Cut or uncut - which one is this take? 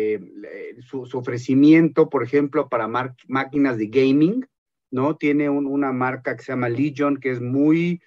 uncut